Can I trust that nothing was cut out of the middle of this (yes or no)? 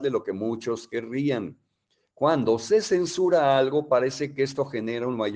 yes